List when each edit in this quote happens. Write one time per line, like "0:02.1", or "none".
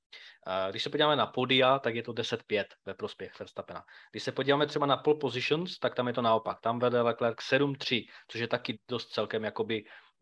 0:08.7